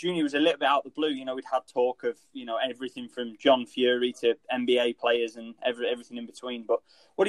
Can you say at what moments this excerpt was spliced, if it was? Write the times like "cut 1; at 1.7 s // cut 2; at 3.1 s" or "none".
none